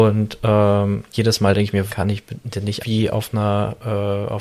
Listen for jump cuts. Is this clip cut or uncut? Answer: cut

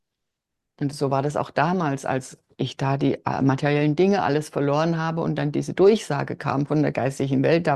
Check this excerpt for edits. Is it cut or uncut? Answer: uncut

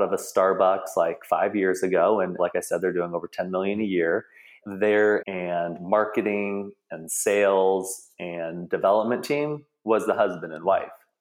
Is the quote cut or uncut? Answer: cut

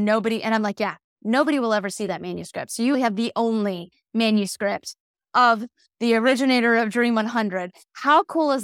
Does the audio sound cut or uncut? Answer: cut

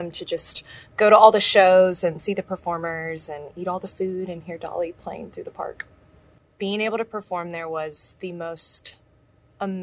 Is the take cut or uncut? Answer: uncut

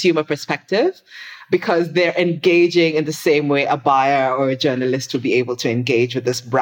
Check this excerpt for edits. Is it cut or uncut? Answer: uncut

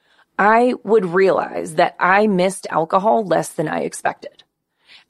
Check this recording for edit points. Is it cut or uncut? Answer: uncut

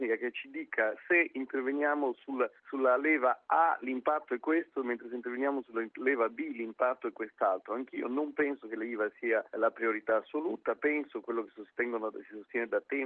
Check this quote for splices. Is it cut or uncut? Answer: cut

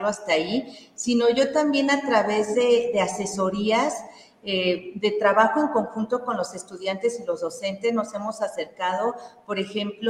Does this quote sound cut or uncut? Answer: uncut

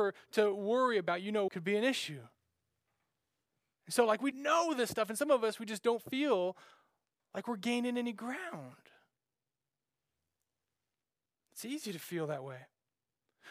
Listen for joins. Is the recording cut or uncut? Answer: cut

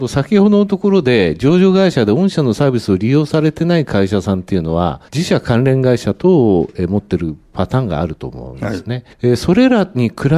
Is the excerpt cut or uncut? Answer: cut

